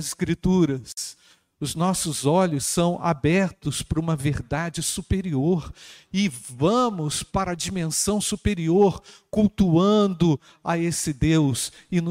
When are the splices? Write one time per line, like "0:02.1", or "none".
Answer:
none